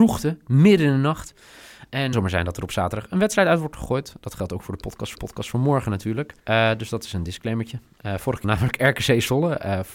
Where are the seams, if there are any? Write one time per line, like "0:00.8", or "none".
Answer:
0:02.1
0:05.1
0:06.4
0:08.4